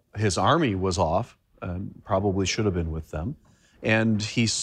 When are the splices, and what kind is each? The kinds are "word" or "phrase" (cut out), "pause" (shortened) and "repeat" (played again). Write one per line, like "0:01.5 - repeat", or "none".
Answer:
none